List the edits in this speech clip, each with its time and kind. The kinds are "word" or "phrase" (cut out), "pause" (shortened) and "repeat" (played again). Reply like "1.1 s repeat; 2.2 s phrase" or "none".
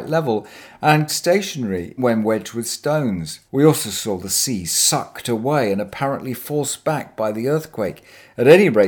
1.1 s phrase; 2.0 s word; 3.5 s pause

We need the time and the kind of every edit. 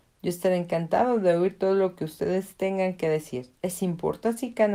3.6 s pause

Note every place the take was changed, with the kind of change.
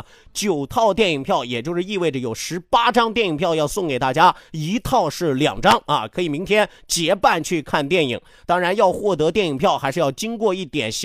none

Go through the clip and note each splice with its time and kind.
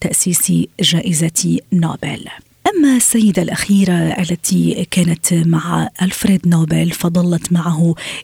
none

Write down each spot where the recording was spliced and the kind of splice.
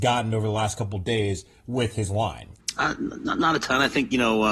none

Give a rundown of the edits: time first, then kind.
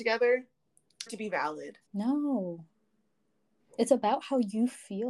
1.1 s word; 1.9 s pause

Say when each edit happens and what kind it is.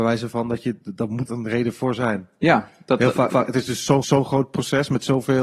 1.3 s phrase; 3.3 s repeat; 4.0 s repeat

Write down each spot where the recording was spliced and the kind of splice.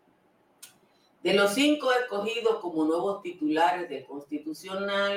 none

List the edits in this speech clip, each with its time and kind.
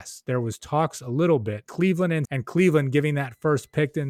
1.7 s word; 2.2 s word

